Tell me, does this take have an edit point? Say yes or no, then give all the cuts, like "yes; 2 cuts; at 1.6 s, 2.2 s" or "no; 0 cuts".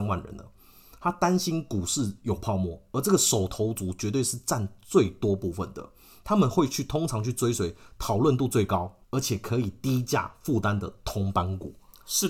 yes; 1 cut; at 9.0 s